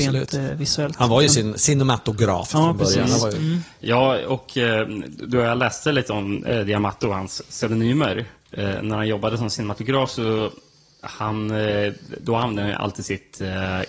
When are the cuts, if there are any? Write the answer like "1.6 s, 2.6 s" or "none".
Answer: none